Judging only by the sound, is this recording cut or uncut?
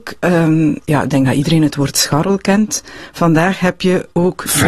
uncut